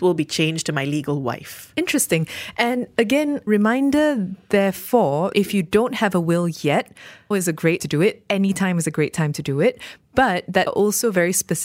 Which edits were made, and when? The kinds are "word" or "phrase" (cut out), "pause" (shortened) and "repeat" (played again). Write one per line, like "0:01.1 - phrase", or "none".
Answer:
0:03.5 - word
0:05.3 - word
0:07.3 - word
0:07.8 - word
0:10.7 - word